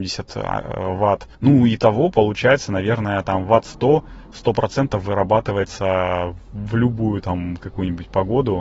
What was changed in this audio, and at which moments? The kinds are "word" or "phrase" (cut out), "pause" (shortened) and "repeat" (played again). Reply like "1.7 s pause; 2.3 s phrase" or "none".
1.3 s pause